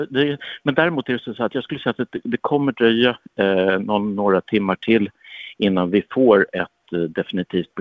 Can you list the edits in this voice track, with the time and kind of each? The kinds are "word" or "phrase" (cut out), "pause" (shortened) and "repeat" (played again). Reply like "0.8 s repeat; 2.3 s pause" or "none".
none